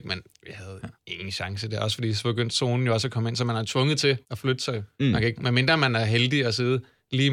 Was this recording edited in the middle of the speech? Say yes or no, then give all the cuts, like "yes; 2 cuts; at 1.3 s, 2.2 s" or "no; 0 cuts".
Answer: yes; 3 cuts; at 0.9 s, 4.2 s, 4.9 s